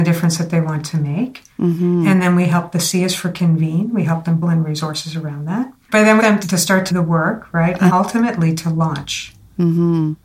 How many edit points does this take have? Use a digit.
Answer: 4